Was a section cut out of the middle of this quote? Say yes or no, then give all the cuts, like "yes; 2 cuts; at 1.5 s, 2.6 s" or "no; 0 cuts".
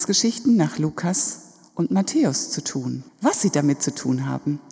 yes; 1 cut; at 3.1 s